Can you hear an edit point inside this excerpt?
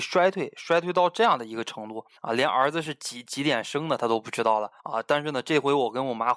yes; 2 cuts; at 2.2 s, 4.8 s

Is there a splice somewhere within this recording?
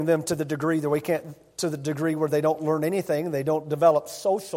no; 0 cuts

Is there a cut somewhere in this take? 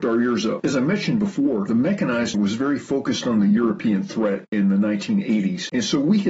yes; 1 cut; at 2.3 s

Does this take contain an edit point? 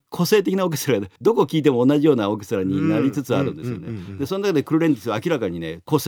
yes; 1 cut; at 1.2 s

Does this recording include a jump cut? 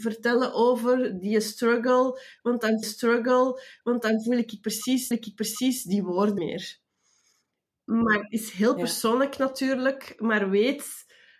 yes; 3 cuts; at 2.8 s, 5.1 s, 6.4 s

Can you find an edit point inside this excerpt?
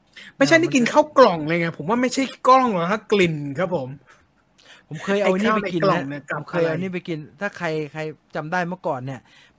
no; 0 cuts

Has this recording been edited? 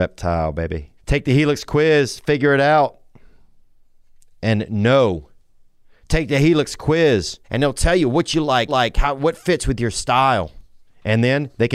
yes; 3 cuts; at 1.0 s, 7.4 s, 8.7 s

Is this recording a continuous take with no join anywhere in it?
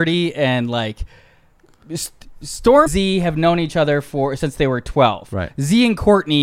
no; 1 cut; at 2.9 s

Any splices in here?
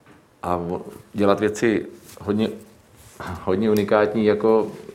no; 0 cuts

